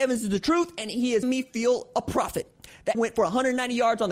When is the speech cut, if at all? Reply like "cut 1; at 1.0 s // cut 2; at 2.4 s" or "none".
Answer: cut 1; at 1.2 s // cut 2; at 2.9 s